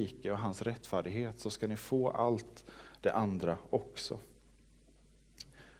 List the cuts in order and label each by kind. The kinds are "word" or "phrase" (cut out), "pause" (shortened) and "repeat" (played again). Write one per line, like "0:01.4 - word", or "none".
none